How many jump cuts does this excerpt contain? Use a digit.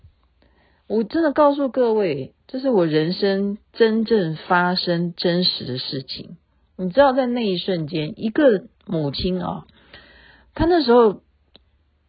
1